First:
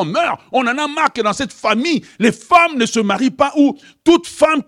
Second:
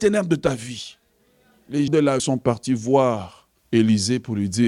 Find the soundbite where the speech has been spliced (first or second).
second